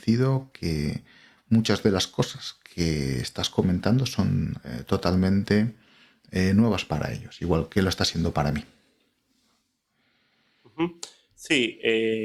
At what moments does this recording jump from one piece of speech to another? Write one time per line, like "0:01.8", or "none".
0:07.7